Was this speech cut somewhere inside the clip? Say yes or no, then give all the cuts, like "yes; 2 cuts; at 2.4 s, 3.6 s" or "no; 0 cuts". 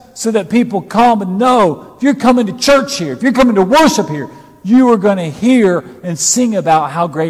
no; 0 cuts